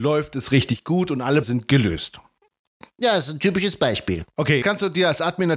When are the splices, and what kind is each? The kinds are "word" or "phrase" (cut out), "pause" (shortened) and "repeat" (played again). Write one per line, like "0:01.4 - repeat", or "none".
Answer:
0:01.4 - word
0:04.6 - word

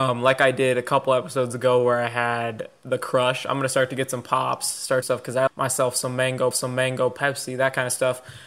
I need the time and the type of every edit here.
0:05.0 - phrase
0:05.5 - word
0:06.5 - repeat

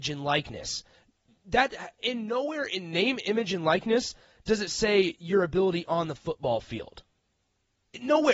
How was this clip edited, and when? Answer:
none

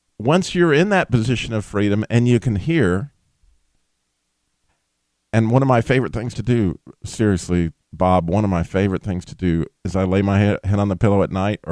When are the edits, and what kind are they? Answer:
0:07.8 - pause
0:09.8 - pause

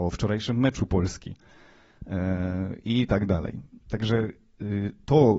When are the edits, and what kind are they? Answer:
none

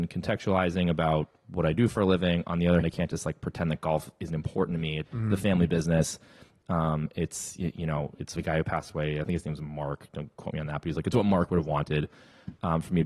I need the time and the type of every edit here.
0:02.8 - word
0:05.1 - word
0:08.4 - word

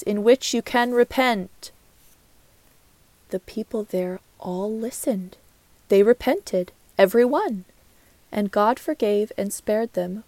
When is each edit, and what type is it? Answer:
none

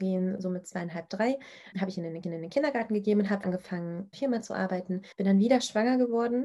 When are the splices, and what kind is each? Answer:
0:01.7 - word
0:02.2 - repeat
0:03.4 - word
0:04.1 - phrase
0:05.1 - pause

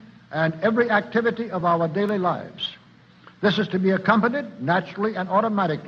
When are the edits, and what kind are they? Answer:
none

